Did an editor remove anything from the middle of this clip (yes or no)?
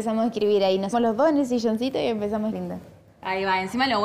yes